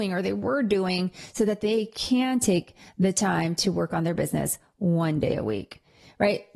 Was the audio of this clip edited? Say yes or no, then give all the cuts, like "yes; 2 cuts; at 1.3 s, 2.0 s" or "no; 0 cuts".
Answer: no; 0 cuts